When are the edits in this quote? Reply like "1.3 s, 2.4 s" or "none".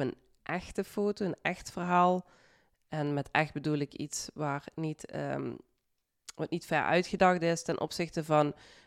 none